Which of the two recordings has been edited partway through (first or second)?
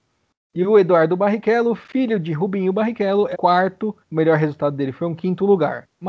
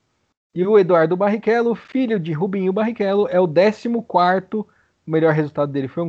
first